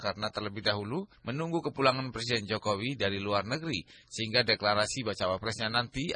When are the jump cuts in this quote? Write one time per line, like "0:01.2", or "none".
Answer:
none